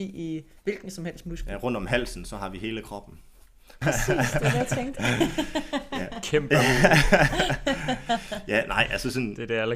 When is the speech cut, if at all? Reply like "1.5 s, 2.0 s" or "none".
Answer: 3.8 s